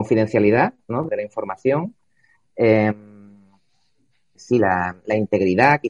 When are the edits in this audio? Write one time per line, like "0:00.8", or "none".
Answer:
0:01.1
0:04.3